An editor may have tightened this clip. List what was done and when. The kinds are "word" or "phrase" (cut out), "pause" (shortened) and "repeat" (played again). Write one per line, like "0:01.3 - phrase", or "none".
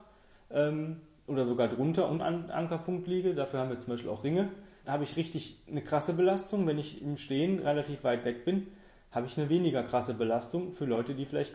0:02.2 - word
0:04.8 - word